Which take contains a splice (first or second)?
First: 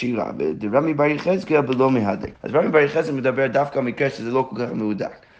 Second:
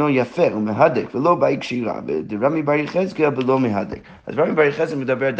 first